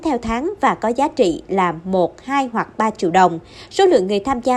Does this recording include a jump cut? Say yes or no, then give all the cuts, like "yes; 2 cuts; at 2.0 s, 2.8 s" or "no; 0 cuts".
no; 0 cuts